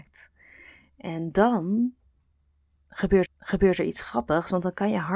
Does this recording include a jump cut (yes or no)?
yes